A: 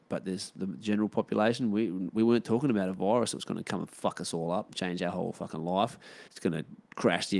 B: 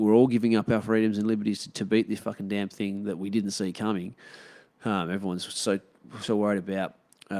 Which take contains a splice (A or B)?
A